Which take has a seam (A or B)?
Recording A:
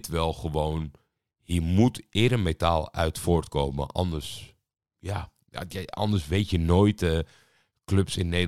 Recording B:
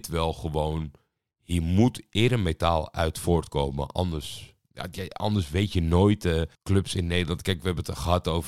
B